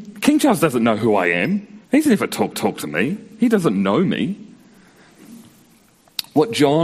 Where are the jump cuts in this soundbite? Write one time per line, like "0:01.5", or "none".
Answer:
0:01.8
0:02.5